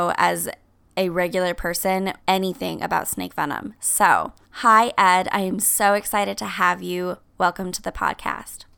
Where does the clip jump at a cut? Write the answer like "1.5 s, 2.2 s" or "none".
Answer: 2.2 s, 4.4 s